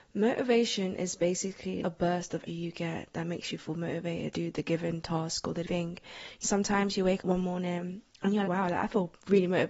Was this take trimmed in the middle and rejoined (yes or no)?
yes